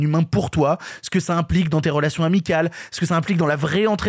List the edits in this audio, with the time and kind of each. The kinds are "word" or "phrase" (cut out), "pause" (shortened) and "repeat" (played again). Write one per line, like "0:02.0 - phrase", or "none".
none